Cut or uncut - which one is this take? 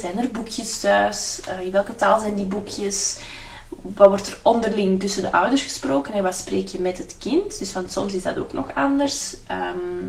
uncut